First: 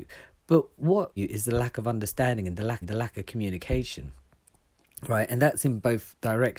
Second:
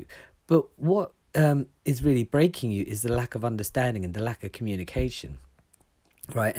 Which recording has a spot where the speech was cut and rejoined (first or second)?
first